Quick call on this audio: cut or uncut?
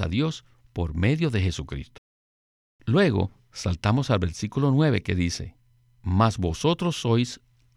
uncut